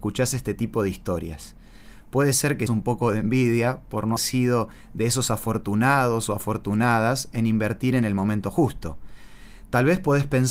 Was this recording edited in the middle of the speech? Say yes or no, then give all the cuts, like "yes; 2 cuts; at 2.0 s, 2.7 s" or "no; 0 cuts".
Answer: yes; 2 cuts; at 2.7 s, 4.2 s